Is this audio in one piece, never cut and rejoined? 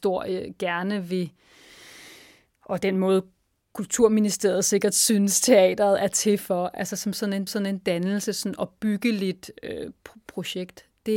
no; 1 cut; at 7.5 s

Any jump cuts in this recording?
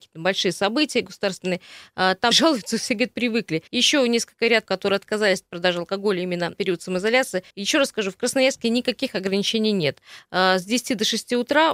yes; 5 cuts; at 2.3 s, 3.7 s, 4.7 s, 6.5 s, 7.5 s

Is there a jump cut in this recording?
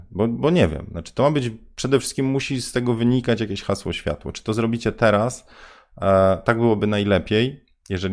no; 0 cuts

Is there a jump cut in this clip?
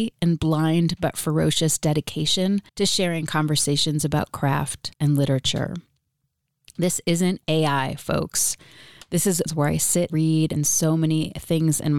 yes; 4 cuts; at 2.7 s, 4.9 s, 9.5 s, 10.1 s

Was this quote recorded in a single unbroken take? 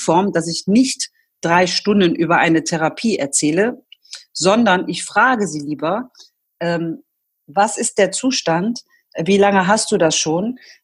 yes; 0 cuts

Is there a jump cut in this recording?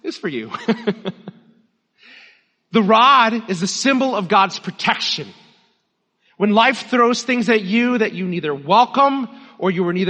no; 0 cuts

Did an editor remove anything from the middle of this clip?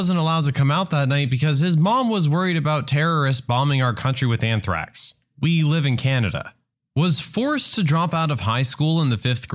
yes; 1 cut; at 6.7 s

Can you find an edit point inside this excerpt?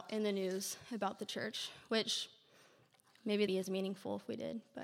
yes; 1 cut; at 3.5 s

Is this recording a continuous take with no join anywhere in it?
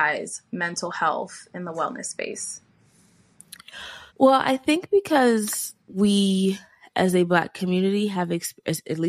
no; 2 cuts; at 4.1 s, 5.8 s

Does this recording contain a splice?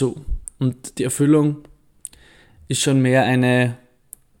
no; 0 cuts

